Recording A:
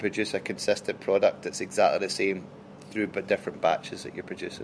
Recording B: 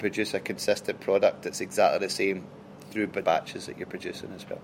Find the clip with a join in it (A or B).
B